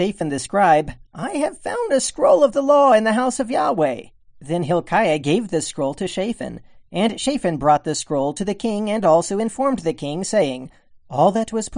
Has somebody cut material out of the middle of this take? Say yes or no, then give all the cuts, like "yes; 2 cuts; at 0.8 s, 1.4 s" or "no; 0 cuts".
no; 0 cuts